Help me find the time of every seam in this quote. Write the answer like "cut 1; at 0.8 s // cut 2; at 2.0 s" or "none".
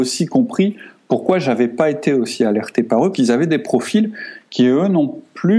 cut 1; at 3.1 s

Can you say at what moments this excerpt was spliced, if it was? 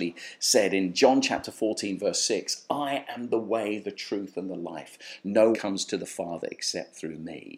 cut 1; at 5.5 s

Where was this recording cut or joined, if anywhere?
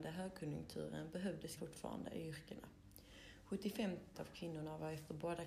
cut 1; at 1.6 s // cut 2; at 4.1 s

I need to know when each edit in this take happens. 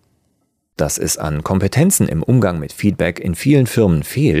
none

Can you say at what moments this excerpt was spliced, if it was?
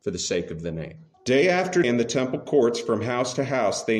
cut 1; at 1.1 s // cut 2; at 1.8 s

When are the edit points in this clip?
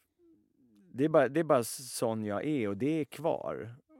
none

